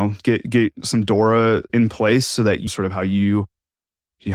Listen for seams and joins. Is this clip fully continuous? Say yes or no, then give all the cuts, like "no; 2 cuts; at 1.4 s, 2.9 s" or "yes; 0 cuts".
no; 2 cuts; at 1.7 s, 2.7 s